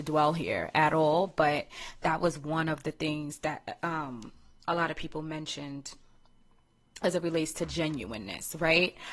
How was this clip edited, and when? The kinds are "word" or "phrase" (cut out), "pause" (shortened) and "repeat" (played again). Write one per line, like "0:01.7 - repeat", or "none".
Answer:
none